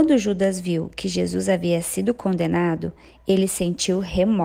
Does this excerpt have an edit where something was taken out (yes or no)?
no